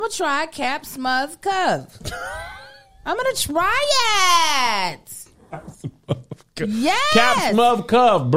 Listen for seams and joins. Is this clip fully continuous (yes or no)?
yes